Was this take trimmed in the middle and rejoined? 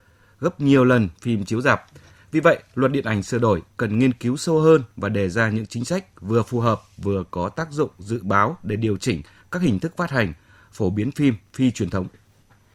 no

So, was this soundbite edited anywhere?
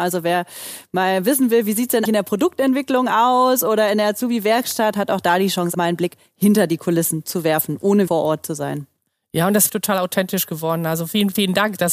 yes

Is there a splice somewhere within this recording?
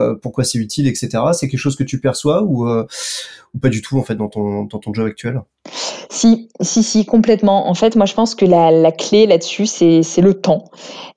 no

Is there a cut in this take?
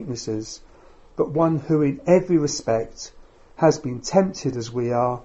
no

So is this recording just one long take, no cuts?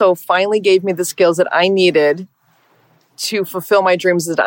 yes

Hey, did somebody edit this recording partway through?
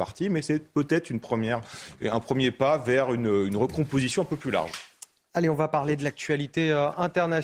no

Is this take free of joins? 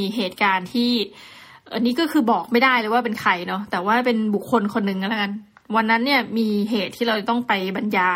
yes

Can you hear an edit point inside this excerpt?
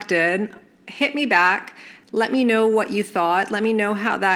no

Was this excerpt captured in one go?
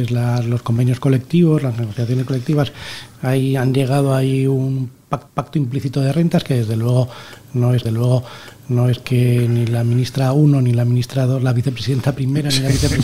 no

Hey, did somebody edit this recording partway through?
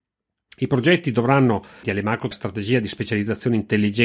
yes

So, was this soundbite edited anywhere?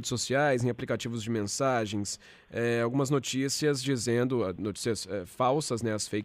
no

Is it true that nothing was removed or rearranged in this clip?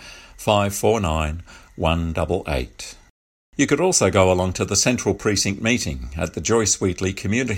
no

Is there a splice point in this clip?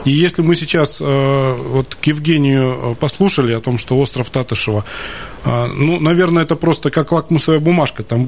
no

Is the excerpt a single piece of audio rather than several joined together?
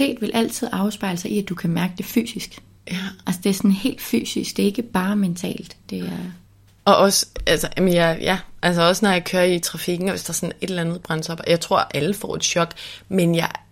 yes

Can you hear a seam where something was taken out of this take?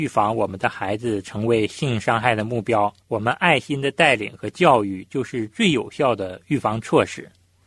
yes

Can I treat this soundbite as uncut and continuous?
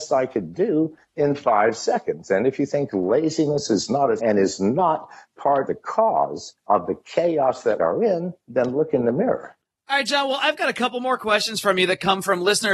no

